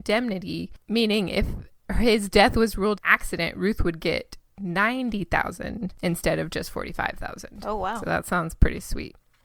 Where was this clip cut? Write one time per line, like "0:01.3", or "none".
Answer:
0:03.0